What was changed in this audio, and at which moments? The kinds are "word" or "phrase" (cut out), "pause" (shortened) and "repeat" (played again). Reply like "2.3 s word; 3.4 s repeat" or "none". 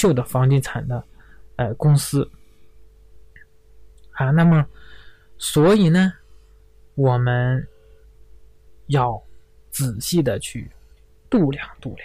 none